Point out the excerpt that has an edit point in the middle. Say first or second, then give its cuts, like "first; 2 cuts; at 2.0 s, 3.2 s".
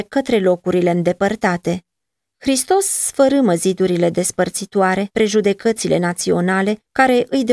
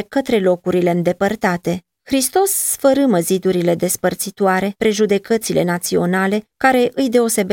second; 1 cut; at 1.9 s